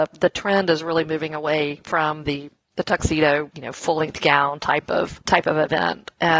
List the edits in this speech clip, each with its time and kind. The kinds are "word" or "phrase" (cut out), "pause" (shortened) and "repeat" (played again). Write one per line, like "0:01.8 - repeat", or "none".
none